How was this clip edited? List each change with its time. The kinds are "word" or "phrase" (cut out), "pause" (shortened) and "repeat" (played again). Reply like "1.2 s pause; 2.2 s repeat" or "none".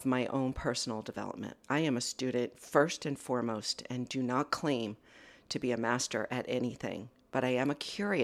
1.6 s pause